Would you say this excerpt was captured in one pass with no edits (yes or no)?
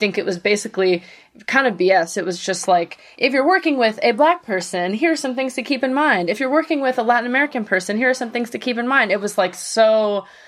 yes